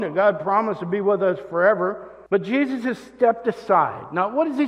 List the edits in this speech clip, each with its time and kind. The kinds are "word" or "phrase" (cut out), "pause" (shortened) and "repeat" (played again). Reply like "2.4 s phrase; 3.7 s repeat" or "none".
2.3 s pause